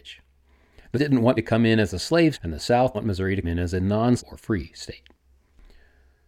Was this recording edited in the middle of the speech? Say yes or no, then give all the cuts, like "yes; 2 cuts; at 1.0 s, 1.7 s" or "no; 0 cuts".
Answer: yes; 6 cuts; at 0.9 s, 1.4 s, 2.3 s, 2.9 s, 3.4 s, 4.2 s